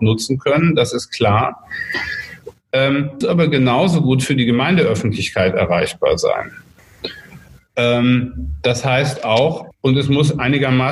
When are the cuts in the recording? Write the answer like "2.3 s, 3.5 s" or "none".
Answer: 3.2 s, 9.7 s